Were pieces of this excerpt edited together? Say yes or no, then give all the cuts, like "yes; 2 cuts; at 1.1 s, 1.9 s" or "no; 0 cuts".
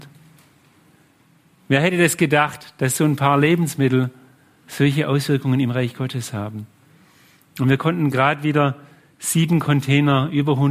no; 0 cuts